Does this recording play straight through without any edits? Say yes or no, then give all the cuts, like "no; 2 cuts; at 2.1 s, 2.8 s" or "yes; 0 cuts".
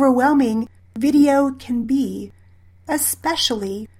yes; 0 cuts